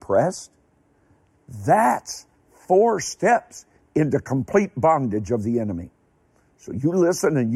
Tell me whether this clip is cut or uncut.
uncut